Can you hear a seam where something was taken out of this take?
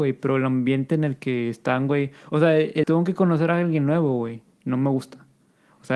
yes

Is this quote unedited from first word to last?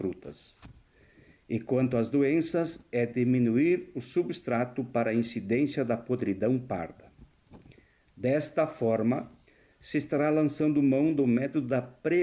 yes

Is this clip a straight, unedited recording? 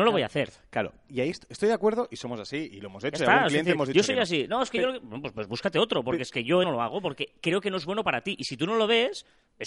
no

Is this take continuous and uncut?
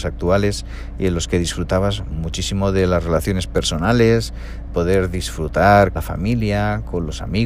no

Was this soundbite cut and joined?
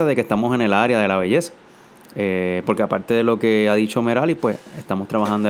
no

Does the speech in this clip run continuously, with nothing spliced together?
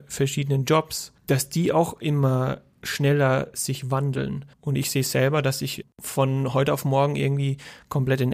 no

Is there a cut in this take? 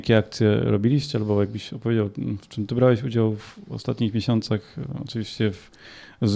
no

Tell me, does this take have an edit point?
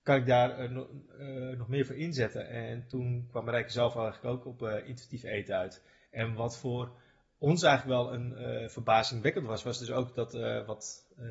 no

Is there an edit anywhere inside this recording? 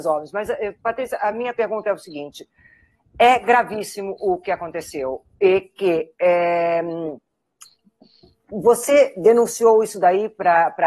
no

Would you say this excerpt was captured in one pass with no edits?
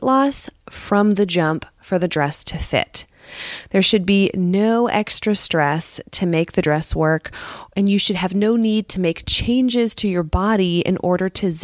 yes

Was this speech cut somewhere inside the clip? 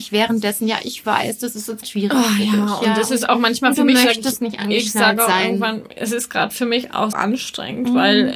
yes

